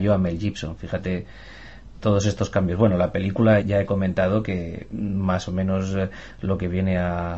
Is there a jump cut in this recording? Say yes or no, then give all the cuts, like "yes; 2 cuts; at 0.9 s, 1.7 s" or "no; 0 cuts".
yes; 2 cuts; at 2.0 s, 3.6 s